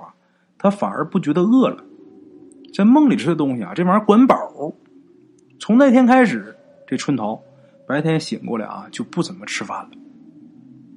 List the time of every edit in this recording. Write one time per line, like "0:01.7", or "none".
none